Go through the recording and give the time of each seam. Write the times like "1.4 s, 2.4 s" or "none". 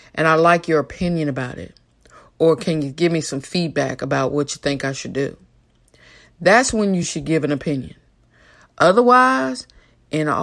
none